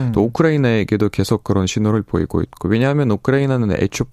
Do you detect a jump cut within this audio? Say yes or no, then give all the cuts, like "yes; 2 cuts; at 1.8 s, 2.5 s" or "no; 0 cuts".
no; 0 cuts